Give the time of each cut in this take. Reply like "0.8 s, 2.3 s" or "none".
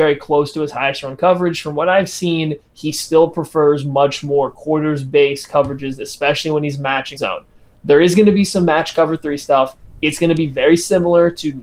7.2 s

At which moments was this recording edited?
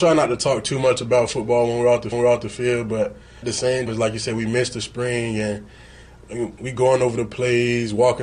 2.1 s, 3.4 s, 3.9 s, 6.6 s

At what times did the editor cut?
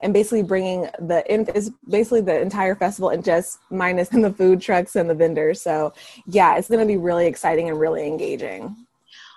1.5 s, 3.2 s, 4.1 s, 6.7 s

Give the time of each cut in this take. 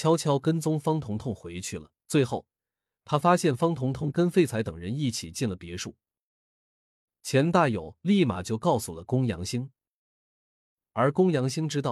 2.0 s

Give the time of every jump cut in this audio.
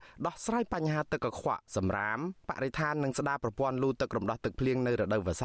1.7 s

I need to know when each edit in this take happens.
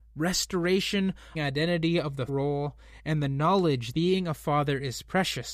1.3 s, 2.3 s, 3.9 s

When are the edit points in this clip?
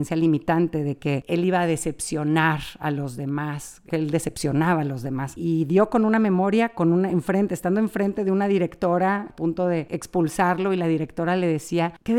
none

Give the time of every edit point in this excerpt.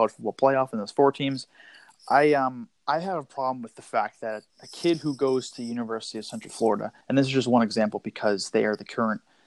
2.8 s, 4.5 s, 7.0 s

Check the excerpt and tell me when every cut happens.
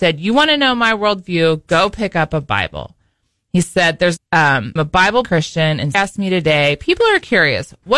4.2 s, 4.8 s, 5.2 s, 5.9 s

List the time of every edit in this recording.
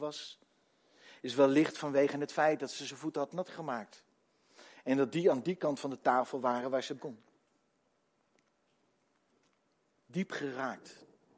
7.0 s

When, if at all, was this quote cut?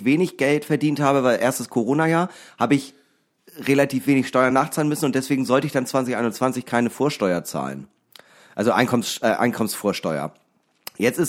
none

